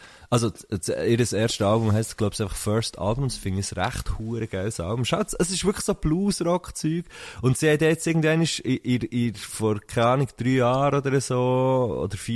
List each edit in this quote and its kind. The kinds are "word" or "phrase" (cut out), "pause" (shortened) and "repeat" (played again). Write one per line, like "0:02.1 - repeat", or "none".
none